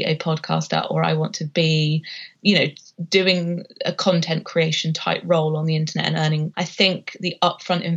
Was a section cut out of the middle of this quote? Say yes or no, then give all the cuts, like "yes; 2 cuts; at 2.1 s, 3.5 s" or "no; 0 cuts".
yes; 1 cut; at 6.5 s